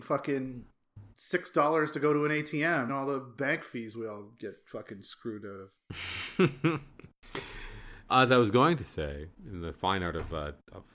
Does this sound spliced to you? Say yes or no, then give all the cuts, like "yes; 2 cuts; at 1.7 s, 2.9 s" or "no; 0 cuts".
yes; 4 cuts; at 1.1 s, 2.9 s, 8.1 s, 9.3 s